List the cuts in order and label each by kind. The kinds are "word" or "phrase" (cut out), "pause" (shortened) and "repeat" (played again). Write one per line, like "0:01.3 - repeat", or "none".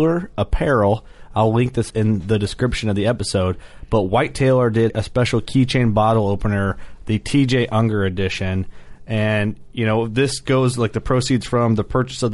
0:01.9 - word
0:04.9 - word

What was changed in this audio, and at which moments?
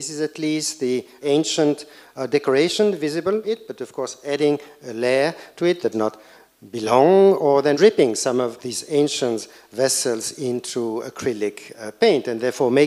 0:01.2 - word
0:03.4 - word
0:05.9 - word
0:07.7 - word
0:08.6 - word

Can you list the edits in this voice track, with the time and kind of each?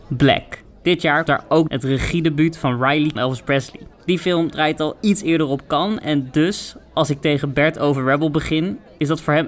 0:01.3 - word
0:01.7 - phrase
0:03.2 - phrase
0:03.9 - pause

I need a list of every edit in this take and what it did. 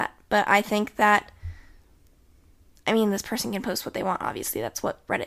none

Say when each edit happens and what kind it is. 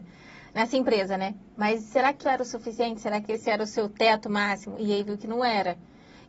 0:02.2 - word
0:05.0 - word

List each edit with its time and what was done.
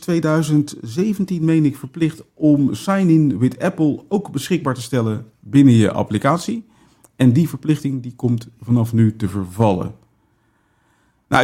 none

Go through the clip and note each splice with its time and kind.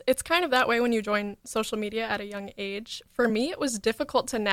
none

